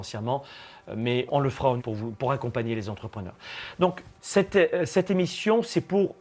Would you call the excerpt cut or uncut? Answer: cut